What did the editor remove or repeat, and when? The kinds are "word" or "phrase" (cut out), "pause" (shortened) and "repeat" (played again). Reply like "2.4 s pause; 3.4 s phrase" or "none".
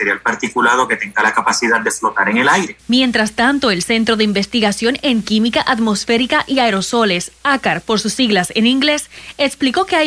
none